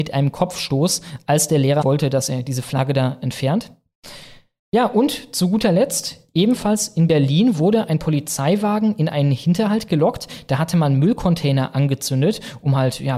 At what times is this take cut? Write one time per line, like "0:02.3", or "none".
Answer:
0:01.8

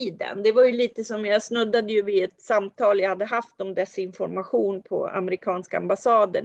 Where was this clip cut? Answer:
none

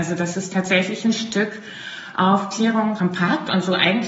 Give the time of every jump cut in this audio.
0:03.0

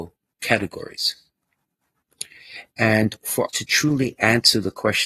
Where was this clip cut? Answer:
0:03.5

